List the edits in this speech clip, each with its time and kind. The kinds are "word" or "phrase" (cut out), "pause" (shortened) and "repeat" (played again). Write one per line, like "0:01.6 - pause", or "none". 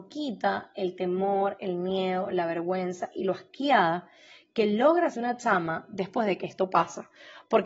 0:05.1 - word